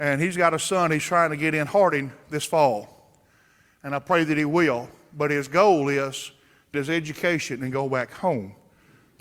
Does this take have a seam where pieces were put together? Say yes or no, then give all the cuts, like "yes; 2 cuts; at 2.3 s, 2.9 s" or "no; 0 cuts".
yes; 1 cut; at 6.7 s